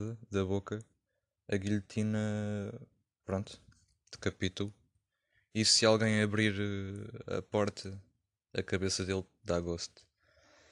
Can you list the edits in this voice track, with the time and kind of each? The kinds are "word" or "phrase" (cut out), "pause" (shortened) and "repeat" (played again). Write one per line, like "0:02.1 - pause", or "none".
0:09.4 - word